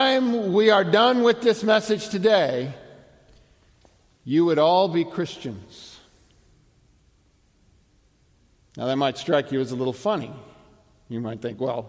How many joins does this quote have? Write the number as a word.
zero